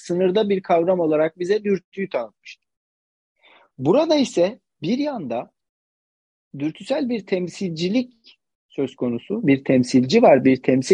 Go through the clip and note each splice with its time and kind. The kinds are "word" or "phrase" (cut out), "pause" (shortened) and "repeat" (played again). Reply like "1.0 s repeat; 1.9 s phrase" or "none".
none